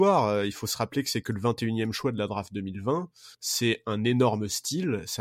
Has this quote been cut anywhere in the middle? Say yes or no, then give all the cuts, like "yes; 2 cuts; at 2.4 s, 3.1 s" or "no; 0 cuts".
yes; 1 cut; at 3.3 s